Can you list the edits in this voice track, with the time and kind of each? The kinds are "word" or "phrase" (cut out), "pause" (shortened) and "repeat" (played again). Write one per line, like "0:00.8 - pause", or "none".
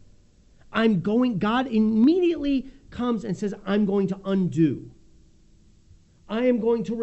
none